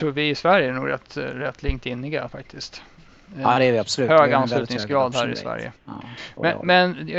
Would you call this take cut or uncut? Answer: cut